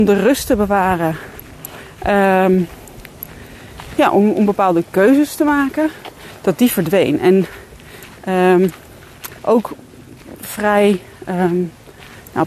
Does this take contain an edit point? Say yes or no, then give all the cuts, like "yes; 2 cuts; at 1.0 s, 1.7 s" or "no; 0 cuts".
yes; 1 cut; at 9.4 s